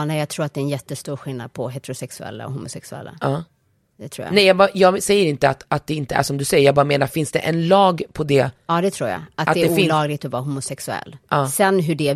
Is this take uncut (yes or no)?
yes